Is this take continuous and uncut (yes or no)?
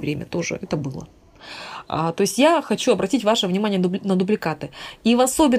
yes